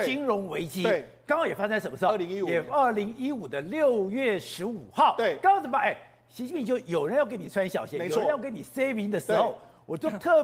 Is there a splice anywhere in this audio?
no; 0 cuts

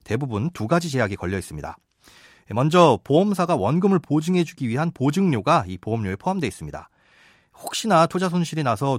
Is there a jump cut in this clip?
no; 0 cuts

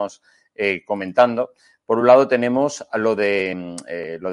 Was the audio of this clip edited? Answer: no; 0 cuts

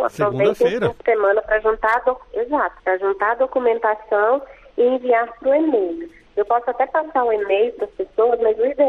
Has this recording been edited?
yes; 1 cut; at 2.8 s

